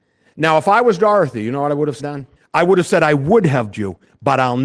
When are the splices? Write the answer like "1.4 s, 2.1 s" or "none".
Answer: 2.0 s, 2.4 s, 3.7 s